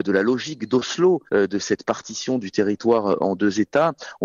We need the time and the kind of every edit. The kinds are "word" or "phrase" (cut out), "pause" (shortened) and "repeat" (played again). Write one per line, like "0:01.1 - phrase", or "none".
0:01.3 - pause